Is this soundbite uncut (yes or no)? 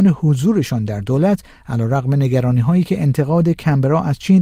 yes